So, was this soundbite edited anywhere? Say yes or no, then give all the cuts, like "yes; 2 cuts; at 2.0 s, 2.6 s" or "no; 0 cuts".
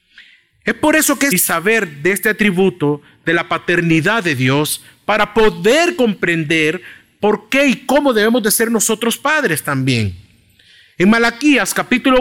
yes; 1 cut; at 1.3 s